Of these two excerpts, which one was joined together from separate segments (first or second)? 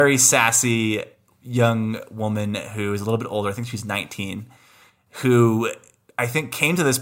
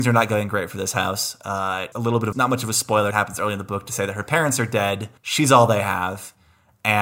second